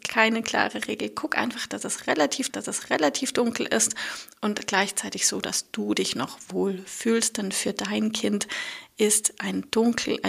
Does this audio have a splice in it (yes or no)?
yes